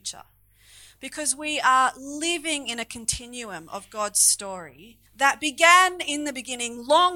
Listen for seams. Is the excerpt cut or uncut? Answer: cut